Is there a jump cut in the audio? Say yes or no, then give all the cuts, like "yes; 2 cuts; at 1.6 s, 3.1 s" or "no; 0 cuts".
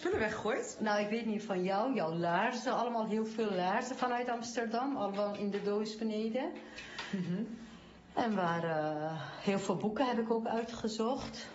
no; 0 cuts